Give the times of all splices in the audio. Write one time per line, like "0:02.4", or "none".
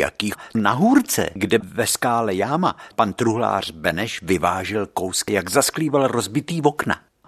0:01.6
0:02.9
0:05.3